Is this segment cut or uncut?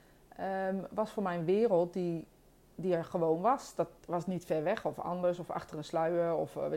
uncut